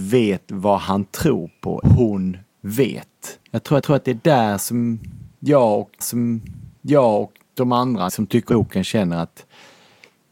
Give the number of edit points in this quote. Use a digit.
6